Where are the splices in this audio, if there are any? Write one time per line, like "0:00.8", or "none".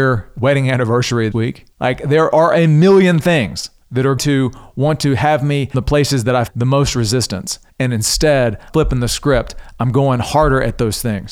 0:01.3
0:01.7
0:03.8
0:04.2
0:05.7
0:06.5
0:07.7
0:08.7